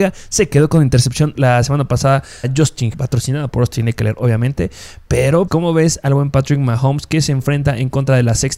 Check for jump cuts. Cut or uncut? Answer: cut